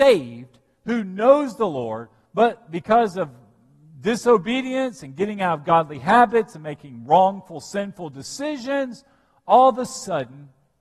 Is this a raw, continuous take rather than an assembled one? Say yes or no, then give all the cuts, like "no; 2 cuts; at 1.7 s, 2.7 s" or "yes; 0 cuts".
yes; 0 cuts